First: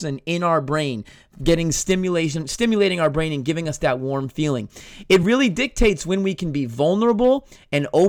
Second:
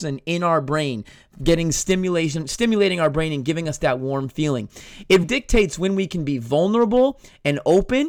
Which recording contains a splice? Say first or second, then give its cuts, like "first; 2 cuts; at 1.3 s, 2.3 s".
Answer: second; 1 cut; at 5.2 s